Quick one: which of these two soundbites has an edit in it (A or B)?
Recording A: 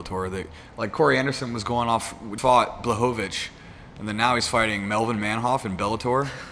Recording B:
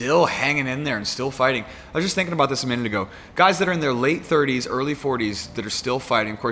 A